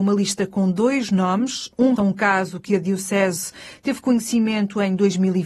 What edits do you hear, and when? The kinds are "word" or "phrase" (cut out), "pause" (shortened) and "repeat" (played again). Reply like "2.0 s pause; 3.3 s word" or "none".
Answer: 2.0 s word